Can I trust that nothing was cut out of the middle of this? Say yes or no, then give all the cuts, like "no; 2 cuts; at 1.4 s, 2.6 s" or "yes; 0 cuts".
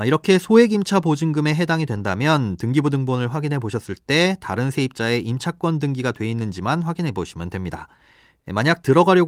yes; 0 cuts